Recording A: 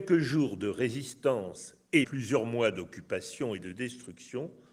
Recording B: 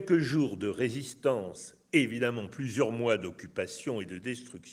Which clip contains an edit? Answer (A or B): A